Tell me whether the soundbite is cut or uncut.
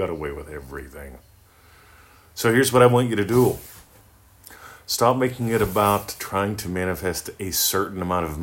uncut